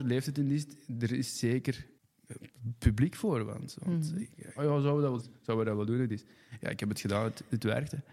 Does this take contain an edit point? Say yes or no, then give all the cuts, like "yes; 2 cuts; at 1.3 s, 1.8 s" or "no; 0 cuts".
yes; 2 cuts; at 4.6 s, 5.2 s